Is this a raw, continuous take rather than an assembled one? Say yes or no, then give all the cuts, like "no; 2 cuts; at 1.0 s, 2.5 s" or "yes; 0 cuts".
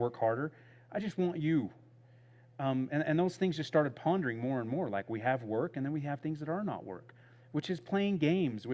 yes; 0 cuts